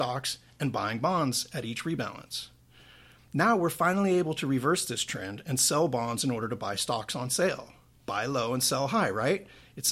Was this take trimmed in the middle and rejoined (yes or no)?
no